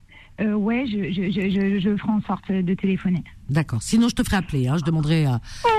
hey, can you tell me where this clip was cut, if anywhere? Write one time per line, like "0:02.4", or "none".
none